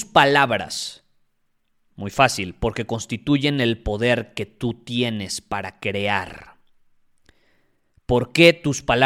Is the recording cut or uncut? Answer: uncut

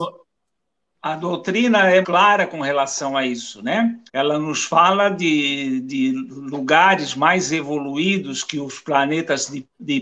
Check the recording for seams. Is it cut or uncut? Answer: cut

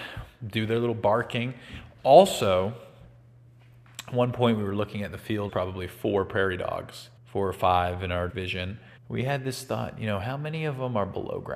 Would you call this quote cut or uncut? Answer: cut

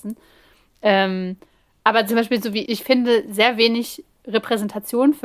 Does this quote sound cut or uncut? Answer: cut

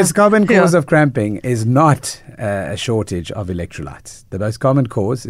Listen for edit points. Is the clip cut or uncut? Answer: uncut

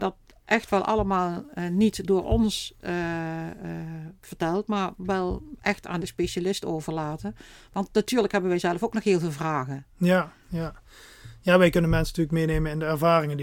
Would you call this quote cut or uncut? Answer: uncut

